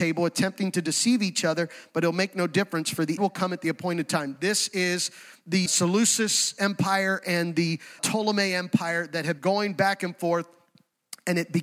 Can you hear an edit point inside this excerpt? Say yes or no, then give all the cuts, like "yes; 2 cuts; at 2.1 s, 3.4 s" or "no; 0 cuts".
yes; 4 cuts; at 3.2 s, 5.7 s, 8.0 s, 9.4 s